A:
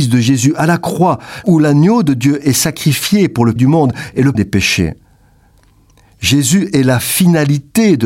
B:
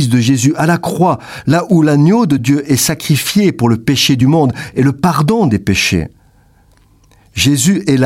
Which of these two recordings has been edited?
A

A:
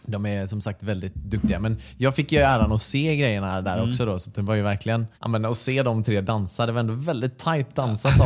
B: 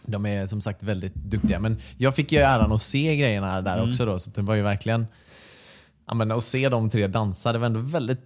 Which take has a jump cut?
A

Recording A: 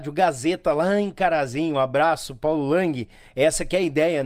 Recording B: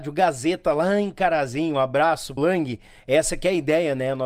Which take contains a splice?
B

